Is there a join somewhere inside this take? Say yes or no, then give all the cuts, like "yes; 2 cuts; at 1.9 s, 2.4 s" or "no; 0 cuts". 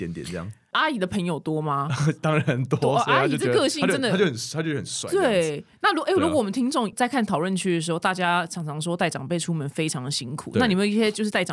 no; 0 cuts